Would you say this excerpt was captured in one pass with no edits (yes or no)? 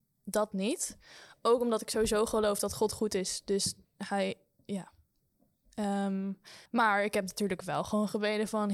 no